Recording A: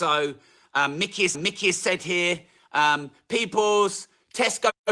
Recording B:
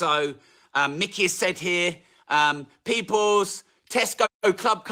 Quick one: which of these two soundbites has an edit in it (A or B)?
A